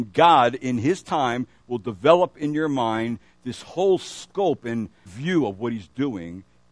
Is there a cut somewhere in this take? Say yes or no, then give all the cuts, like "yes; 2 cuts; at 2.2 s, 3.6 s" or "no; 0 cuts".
yes; 1 cut; at 5.1 s